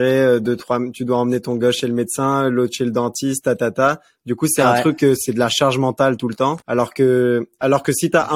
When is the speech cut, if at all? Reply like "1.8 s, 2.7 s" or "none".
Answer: 6.6 s